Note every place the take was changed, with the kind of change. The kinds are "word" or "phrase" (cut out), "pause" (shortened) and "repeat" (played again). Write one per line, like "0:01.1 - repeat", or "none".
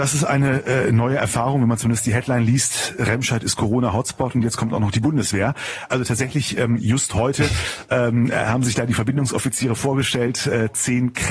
none